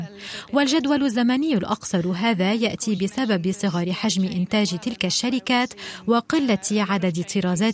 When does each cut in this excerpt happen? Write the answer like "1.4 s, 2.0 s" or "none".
none